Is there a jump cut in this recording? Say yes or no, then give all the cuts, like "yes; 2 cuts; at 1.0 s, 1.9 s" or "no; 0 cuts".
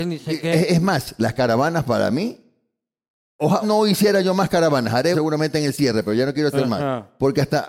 yes; 2 cuts; at 3.6 s, 5.1 s